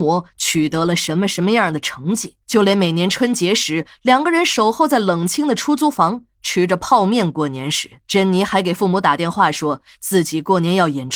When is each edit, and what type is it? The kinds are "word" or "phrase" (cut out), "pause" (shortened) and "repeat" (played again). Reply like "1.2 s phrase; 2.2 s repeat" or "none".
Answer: 2.4 s pause; 8.0 s pause